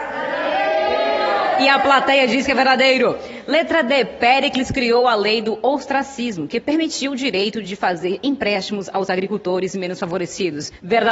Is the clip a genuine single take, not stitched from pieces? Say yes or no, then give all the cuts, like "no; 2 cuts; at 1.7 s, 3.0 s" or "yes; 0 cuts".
yes; 0 cuts